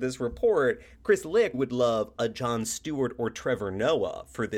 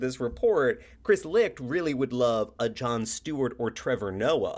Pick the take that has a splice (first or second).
first